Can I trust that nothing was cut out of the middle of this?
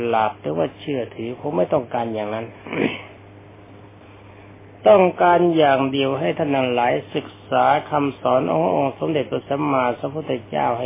yes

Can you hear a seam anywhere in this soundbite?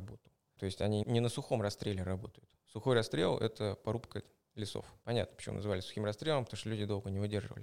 no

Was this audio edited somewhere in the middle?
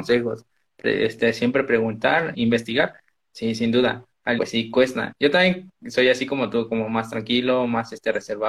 yes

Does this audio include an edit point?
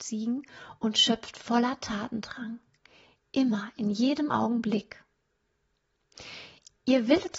no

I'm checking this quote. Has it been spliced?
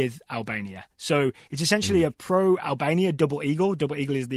no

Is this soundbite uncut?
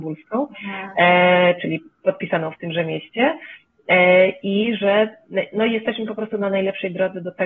yes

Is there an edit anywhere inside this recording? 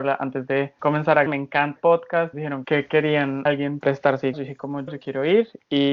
yes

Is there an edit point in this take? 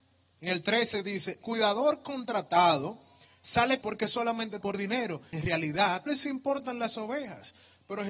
yes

